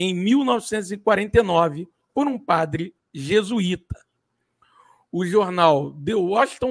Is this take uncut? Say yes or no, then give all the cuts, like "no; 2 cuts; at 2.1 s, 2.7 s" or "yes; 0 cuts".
yes; 0 cuts